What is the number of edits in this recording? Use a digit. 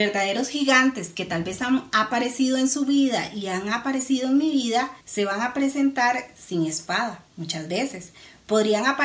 2